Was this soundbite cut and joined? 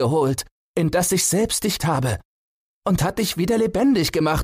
yes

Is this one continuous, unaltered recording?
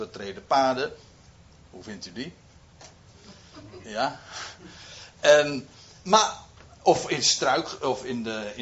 yes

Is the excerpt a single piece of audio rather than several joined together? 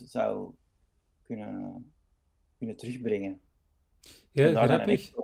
yes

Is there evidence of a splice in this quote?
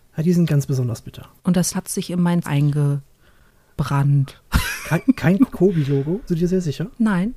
yes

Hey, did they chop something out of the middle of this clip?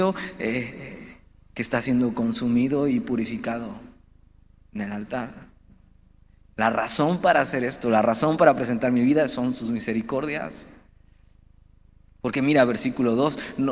no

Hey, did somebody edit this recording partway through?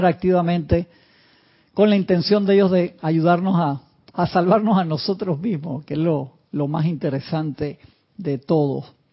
no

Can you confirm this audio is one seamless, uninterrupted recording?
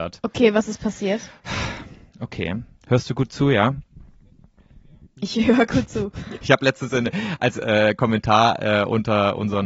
yes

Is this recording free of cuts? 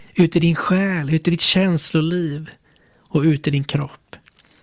yes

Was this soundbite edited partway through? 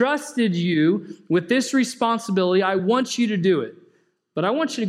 no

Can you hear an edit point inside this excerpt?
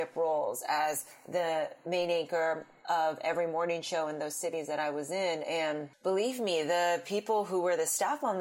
no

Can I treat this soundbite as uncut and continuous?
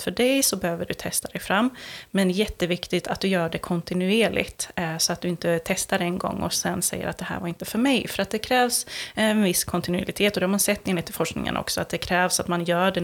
yes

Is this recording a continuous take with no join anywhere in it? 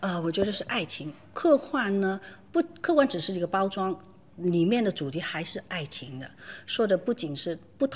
yes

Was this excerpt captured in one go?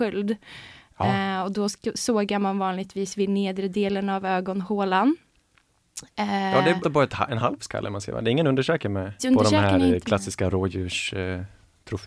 no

